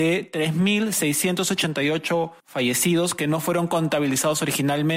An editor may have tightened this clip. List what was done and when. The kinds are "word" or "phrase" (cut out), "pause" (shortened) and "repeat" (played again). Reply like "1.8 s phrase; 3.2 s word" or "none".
2.4 s pause